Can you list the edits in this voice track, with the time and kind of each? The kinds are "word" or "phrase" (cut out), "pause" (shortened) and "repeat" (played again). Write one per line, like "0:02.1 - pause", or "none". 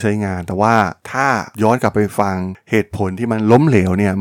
0:01.0 - pause
0:01.5 - pause